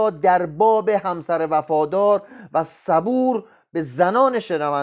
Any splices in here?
no; 0 cuts

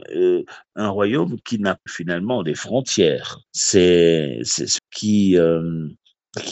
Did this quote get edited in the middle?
yes; 3 cuts; at 1.9 s, 3.5 s, 4.8 s

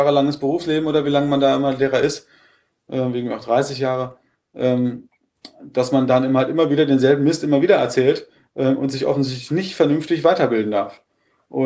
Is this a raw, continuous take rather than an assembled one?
yes; 0 cuts

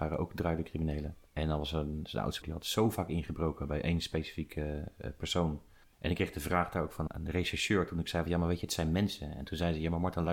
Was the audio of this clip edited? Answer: yes; 4 cuts; at 1.3 s, 2.4 s, 5.8 s, 7.1 s

